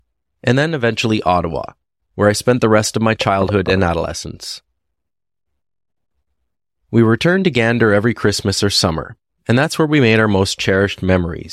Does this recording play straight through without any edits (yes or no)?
yes